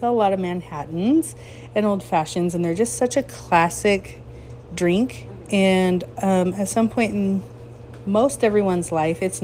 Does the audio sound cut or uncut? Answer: uncut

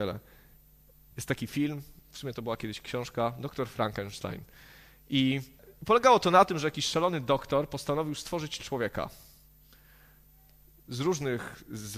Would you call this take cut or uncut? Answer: uncut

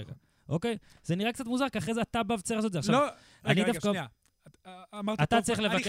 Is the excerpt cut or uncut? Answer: uncut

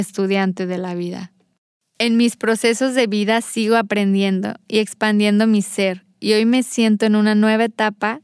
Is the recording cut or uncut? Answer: uncut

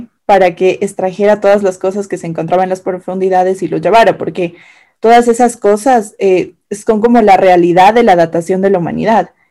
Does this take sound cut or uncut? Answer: uncut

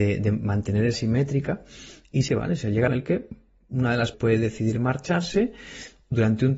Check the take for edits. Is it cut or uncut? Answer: cut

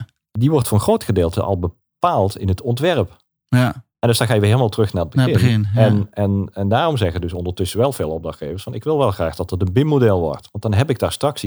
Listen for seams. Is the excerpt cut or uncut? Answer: cut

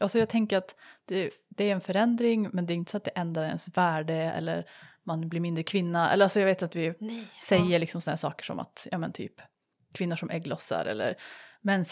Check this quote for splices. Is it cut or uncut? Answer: uncut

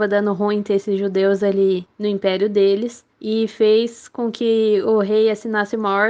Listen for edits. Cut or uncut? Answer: cut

